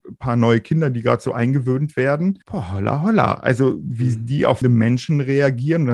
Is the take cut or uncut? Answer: cut